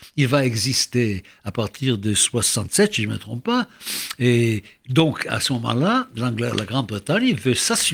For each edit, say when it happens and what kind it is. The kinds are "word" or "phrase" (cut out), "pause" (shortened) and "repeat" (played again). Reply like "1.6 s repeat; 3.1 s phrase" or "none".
none

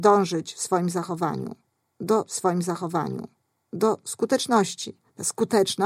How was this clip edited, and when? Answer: 2.3 s repeat

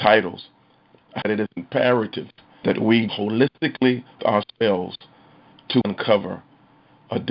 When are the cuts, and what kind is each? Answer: 1.2 s word; 2.6 s word; 3.1 s word; 4.2 s word; 5.8 s word

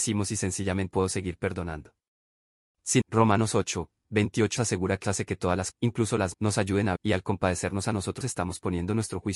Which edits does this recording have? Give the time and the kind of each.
0.9 s word; 3.0 s word; 4.6 s word; 5.0 s word; 5.7 s word; 6.3 s word; 7.0 s word; 8.2 s word

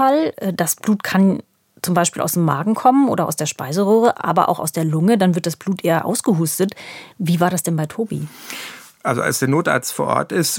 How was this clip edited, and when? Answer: none

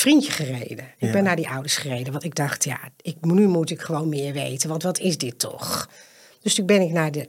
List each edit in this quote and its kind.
none

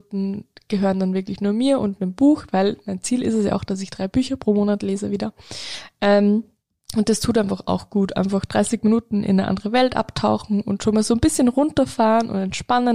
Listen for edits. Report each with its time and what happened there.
6.8 s pause

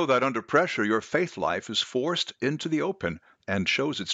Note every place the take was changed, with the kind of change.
none

